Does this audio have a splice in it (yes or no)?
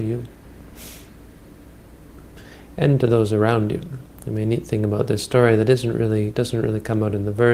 no